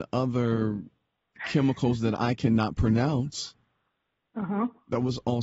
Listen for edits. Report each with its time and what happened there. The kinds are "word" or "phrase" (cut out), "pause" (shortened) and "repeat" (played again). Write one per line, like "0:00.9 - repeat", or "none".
none